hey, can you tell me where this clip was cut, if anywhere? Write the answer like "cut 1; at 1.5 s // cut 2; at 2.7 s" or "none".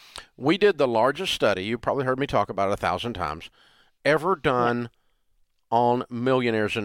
none